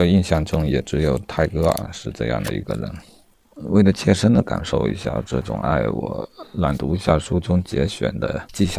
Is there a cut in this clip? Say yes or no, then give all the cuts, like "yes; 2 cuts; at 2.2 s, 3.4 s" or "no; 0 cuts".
no; 0 cuts